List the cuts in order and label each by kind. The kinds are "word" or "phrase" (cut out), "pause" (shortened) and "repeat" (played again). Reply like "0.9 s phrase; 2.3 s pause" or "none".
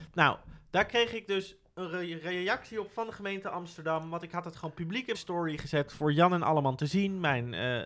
5.1 s word